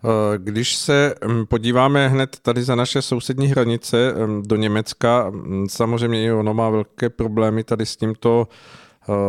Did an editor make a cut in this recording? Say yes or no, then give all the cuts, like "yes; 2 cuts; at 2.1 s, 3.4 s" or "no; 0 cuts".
no; 0 cuts